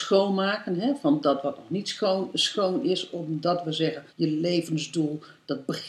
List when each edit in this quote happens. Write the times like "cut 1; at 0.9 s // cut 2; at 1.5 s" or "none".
cut 1; at 4.1 s